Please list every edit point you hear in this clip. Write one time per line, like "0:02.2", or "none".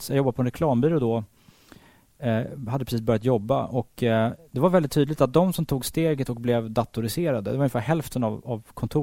none